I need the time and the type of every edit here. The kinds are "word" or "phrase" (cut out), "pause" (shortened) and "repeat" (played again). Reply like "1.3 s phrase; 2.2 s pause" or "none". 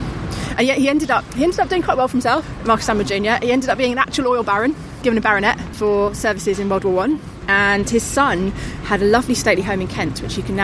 1.3 s word